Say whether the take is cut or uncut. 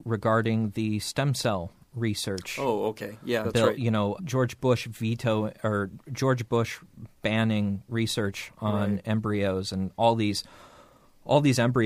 cut